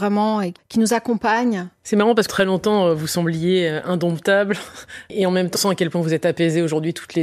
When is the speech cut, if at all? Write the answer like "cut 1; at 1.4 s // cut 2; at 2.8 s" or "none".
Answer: cut 1; at 2.3 s // cut 2; at 5.5 s